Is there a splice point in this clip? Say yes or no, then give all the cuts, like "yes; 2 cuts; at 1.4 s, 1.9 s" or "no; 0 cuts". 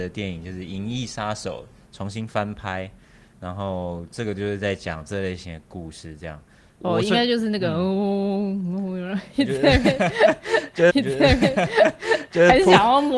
yes; 1 cut; at 10.9 s